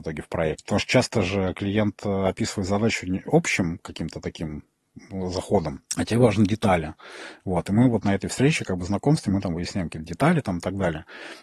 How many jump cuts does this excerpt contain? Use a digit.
2